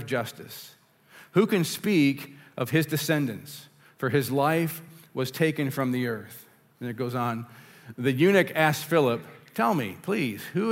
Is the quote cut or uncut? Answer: uncut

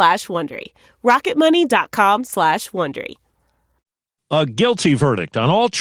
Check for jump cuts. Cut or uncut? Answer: uncut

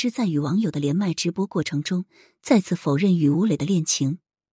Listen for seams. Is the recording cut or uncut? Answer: uncut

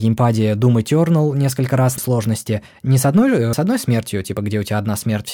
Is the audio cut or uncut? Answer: cut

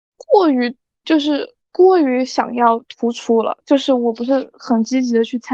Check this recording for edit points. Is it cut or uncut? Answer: cut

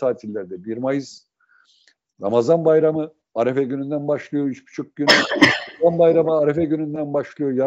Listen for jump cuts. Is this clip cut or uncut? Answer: uncut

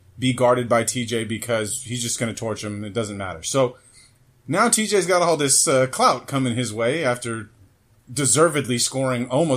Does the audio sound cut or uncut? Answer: uncut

